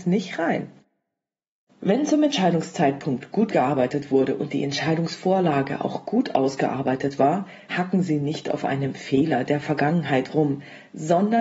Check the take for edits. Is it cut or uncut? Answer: cut